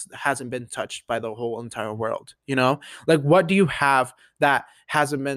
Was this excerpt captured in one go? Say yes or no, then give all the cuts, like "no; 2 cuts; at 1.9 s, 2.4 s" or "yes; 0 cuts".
no; 1 cut; at 2.4 s